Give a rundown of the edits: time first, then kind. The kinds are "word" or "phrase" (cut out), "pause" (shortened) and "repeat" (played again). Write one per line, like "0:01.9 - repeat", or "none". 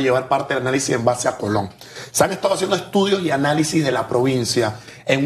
none

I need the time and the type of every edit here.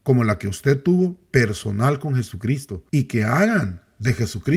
0:02.9 - pause

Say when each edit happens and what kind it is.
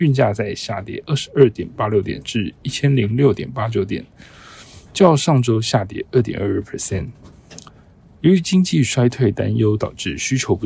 none

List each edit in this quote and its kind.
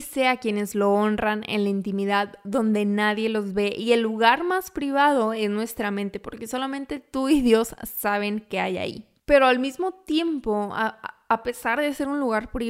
none

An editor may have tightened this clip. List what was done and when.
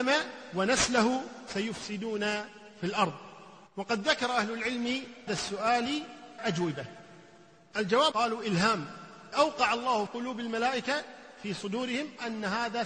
0:03.7 - pause
0:05.3 - word
0:06.4 - word
0:08.1 - word
0:09.3 - word
0:10.1 - word

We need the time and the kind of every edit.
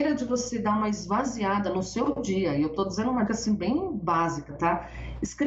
0:03.3 - word

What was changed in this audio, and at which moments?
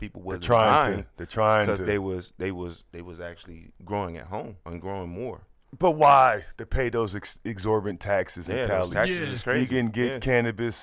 0:03.8 - pause
0:04.6 - pause

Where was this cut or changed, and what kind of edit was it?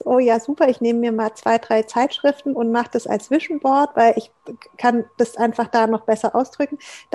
none

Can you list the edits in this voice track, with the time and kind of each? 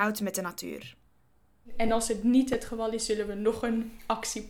none

